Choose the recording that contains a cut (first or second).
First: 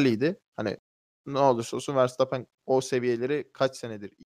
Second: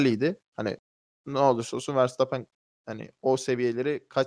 first